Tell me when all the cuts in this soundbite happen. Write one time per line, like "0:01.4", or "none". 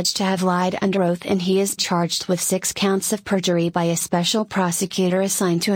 0:01.8